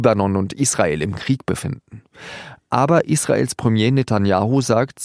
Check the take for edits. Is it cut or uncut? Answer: uncut